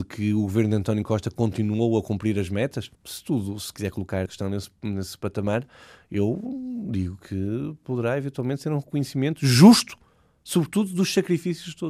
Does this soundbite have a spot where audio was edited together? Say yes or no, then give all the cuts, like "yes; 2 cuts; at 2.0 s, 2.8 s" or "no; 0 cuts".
yes; 2 cuts; at 2.9 s, 4.3 s